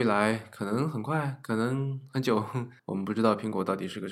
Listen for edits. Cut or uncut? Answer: cut